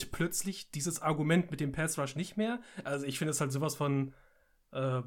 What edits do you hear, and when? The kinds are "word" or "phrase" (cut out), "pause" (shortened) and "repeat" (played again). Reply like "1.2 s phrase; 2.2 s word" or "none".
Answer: none